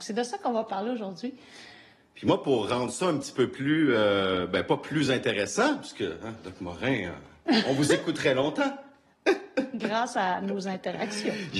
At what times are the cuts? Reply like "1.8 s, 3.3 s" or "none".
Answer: none